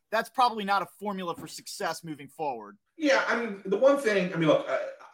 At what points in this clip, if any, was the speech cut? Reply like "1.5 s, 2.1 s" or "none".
2.9 s